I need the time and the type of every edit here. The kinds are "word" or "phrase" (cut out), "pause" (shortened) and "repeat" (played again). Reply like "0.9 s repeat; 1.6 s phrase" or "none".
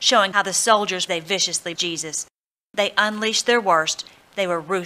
1.1 s phrase; 1.7 s word